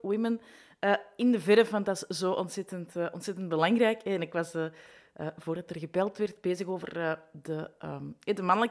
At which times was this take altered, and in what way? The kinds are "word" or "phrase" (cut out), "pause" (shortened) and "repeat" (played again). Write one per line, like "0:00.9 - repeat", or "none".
none